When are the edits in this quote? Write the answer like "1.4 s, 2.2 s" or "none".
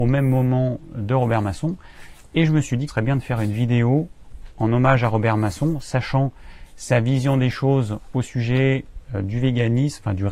2.9 s